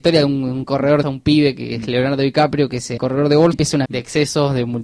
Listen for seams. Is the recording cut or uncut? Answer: cut